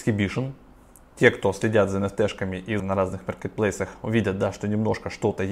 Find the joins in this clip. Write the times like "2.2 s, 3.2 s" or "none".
2.8 s

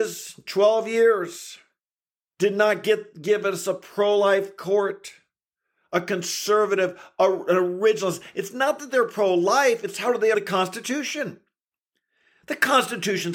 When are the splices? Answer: 10.3 s

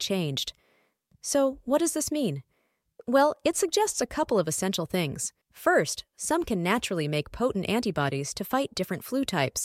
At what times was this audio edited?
5.4 s

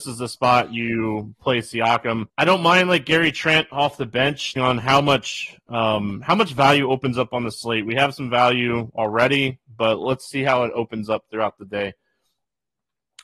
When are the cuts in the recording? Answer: 2.3 s, 4.6 s

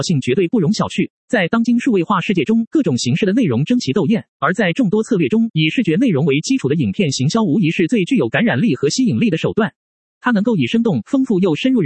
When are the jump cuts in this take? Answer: 1.2 s, 4.3 s

